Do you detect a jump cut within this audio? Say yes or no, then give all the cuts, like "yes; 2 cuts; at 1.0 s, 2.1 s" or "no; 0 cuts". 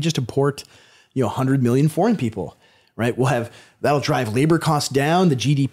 no; 0 cuts